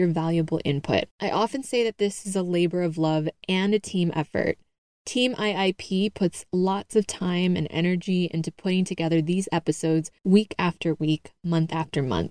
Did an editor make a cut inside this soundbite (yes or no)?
yes